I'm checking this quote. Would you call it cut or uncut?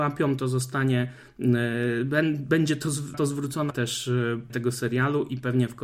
cut